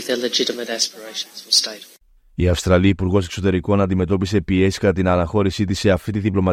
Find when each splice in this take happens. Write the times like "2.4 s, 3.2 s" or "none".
none